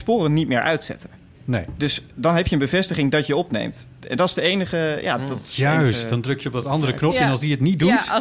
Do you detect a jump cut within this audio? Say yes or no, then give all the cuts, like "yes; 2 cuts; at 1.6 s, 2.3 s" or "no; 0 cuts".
no; 0 cuts